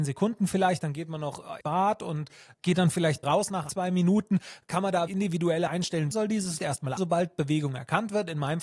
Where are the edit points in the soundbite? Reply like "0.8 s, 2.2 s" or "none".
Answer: 1.6 s, 2.5 s, 3.2 s, 3.7 s, 5.1 s, 5.7 s, 6.1 s, 6.6 s, 7.0 s